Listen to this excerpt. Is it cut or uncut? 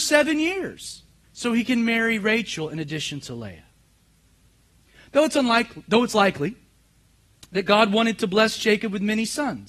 cut